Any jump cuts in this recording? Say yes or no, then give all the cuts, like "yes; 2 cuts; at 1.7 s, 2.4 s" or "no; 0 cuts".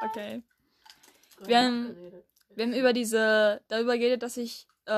no; 0 cuts